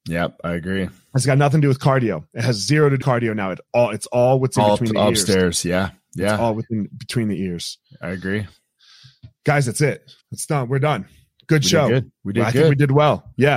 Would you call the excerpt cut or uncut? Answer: cut